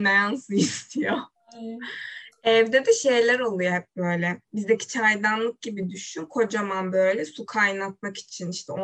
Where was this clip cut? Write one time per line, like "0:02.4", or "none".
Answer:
0:04.4